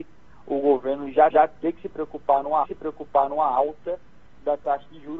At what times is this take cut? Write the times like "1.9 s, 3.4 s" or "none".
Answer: 1.3 s, 2.6 s